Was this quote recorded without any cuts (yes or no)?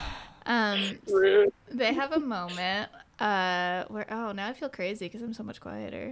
yes